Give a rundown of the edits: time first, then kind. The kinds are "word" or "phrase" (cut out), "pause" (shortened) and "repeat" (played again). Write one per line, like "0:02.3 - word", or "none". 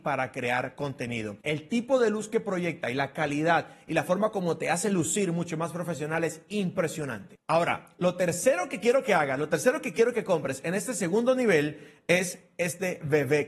0:01.4 - pause